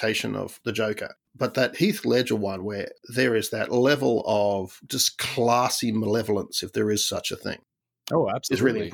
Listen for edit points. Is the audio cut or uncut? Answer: cut